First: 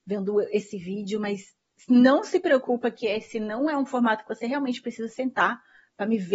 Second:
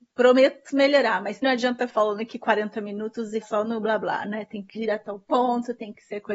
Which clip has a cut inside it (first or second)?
second